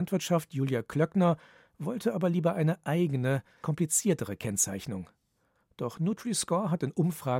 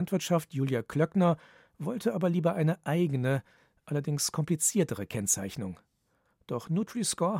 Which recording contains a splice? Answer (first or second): first